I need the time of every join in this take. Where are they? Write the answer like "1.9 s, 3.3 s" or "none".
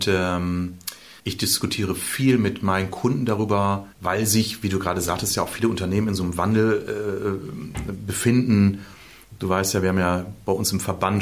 1.2 s, 3.9 s